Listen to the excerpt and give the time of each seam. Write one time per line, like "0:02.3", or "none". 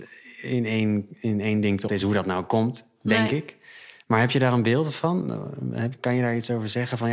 0:01.9